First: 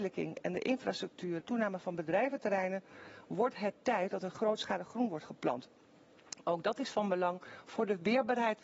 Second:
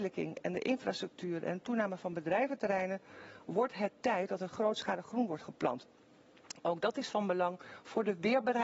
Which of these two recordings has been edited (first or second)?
first